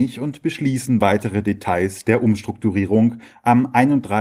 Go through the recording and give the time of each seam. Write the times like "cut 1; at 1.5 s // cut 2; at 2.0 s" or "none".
none